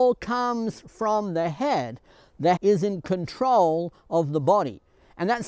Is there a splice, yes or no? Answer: yes